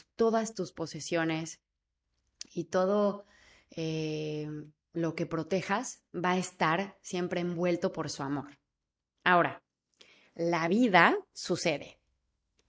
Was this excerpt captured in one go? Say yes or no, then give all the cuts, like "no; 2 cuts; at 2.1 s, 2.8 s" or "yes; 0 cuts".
yes; 0 cuts